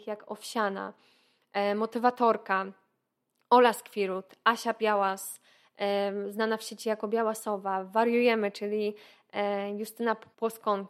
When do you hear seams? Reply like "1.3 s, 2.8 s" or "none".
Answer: none